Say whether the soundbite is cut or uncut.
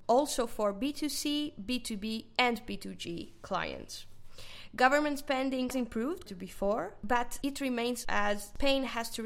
cut